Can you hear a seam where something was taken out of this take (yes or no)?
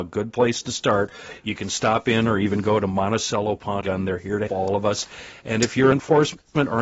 yes